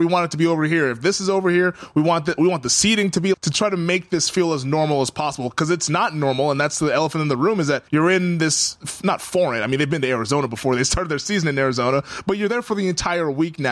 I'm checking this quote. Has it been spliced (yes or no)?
yes